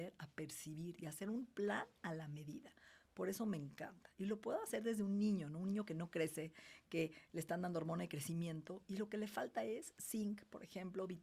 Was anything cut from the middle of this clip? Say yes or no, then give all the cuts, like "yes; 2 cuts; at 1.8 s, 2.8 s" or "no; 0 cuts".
no; 0 cuts